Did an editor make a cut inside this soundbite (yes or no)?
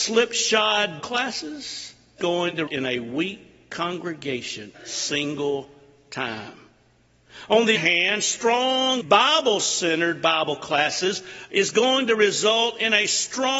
yes